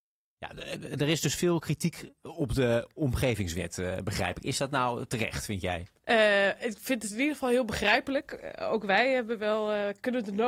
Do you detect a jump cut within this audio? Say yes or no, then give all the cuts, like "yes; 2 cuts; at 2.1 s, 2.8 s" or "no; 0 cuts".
yes; 1 cut; at 6.0 s